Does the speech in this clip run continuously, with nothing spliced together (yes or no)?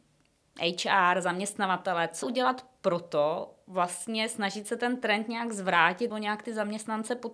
no